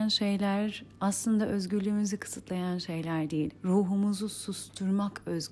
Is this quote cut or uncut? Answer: uncut